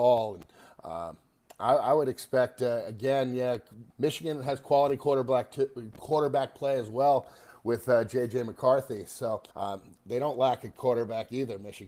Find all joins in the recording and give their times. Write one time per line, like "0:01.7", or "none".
0:03.9
0:09.5